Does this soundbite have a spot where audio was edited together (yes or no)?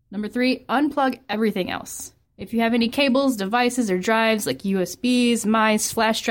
yes